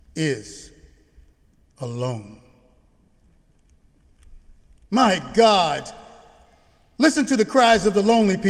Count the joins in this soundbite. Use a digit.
0